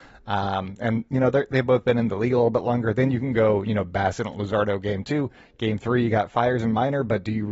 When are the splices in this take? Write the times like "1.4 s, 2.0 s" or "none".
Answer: none